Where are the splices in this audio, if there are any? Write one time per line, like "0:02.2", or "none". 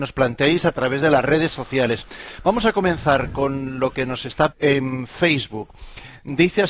0:04.5